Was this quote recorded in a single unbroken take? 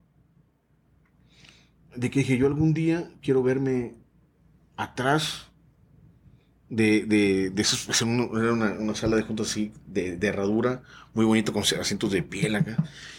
yes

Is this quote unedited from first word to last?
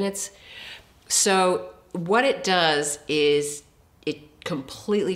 yes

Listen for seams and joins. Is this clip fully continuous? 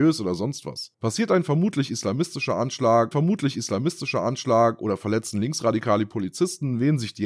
no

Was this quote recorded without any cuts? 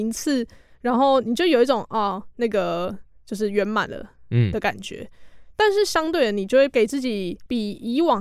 yes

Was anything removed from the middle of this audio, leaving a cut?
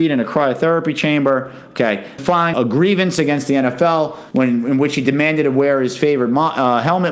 yes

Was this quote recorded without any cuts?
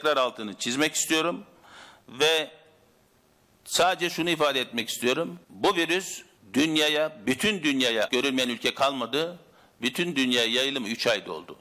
no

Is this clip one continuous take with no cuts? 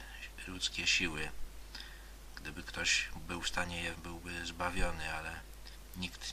no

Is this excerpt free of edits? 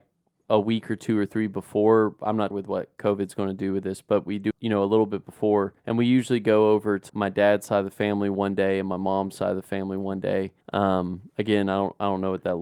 no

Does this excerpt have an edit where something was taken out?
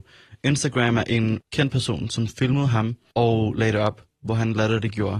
no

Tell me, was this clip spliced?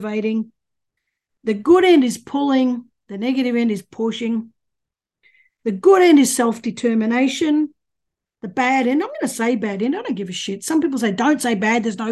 no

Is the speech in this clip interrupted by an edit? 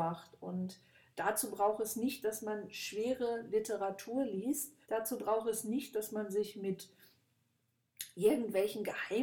yes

